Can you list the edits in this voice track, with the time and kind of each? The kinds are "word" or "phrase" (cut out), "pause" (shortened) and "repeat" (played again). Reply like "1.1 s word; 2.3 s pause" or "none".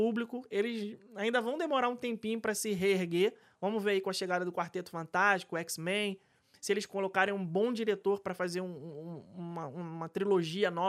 none